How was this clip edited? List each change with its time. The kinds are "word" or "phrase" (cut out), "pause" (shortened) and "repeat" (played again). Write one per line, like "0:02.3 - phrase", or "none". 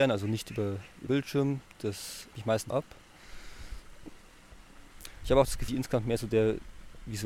0:01.1 - word
0:02.3 - word
0:02.7 - word
0:05.7 - word